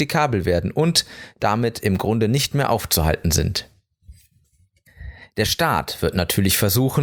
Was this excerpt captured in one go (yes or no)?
yes